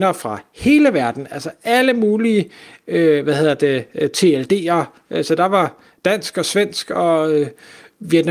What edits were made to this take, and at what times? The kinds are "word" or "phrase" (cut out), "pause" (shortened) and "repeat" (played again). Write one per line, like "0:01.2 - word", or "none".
none